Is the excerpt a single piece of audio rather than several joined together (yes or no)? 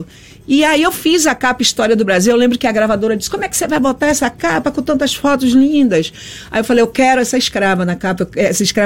yes